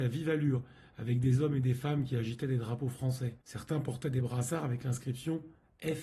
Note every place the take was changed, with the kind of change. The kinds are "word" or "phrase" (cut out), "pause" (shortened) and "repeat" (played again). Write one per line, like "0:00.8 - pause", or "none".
0:03.4 - pause